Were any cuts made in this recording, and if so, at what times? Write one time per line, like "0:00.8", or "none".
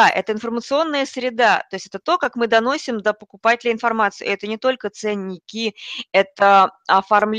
none